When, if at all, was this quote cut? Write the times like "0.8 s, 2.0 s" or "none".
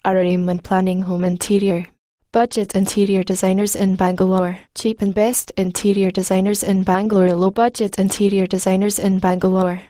4.7 s